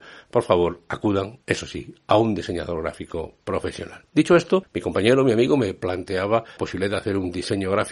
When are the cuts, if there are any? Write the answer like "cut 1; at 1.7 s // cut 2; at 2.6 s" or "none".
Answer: cut 1; at 1.4 s // cut 2; at 4.1 s // cut 3; at 6.6 s